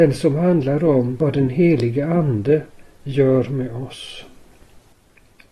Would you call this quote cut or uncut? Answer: uncut